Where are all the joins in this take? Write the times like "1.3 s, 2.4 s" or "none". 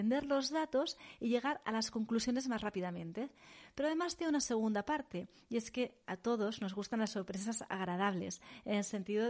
6.0 s